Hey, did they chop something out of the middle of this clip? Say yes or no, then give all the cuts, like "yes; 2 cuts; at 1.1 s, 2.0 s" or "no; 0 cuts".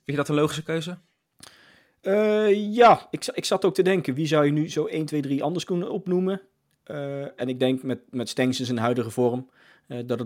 no; 0 cuts